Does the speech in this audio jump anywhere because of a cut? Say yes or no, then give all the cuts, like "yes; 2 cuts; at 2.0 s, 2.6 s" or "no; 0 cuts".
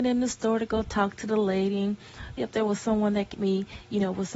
yes; 2 cuts; at 2.4 s, 3.3 s